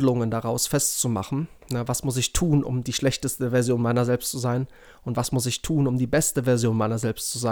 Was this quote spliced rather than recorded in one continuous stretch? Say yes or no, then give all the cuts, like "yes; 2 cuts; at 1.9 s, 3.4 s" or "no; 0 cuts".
no; 0 cuts